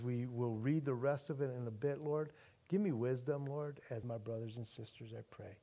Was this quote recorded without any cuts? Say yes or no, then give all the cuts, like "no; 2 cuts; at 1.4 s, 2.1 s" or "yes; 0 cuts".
no; 1 cut; at 4.0 s